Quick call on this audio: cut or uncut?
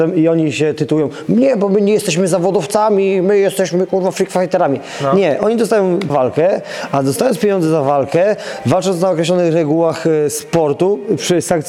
cut